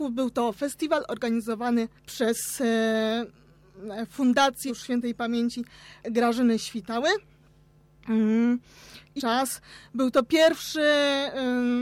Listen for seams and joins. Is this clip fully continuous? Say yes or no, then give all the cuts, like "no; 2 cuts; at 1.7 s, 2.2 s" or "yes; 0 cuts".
no; 4 cuts; at 2.0 s, 4.7 s, 6.0 s, 9.2 s